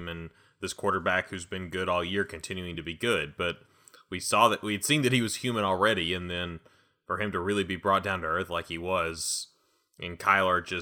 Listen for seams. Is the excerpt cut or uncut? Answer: uncut